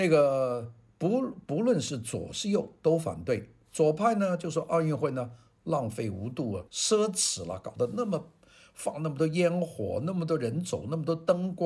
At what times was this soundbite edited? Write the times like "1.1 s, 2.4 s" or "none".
6.7 s